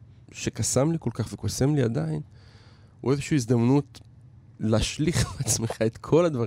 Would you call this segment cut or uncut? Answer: uncut